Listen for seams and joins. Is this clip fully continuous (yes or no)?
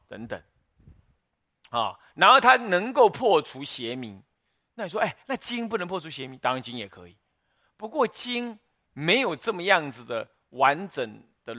yes